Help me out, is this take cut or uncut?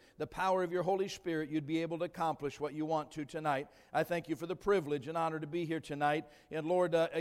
uncut